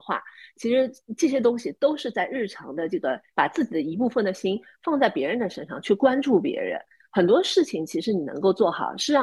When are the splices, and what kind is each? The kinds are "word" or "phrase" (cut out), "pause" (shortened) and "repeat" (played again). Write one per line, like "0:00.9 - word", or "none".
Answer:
none